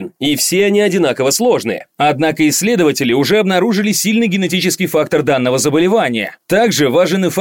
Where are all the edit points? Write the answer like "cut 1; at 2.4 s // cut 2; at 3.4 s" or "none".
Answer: none